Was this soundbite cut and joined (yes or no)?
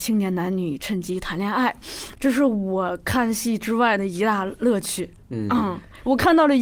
no